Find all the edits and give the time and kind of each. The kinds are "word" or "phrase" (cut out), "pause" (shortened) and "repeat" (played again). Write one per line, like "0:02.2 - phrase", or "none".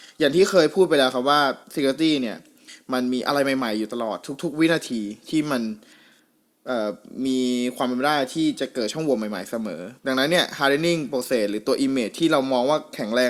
0:01.6 - pause
0:10.0 - pause